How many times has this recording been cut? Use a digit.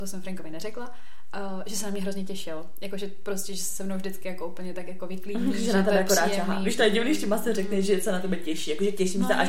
0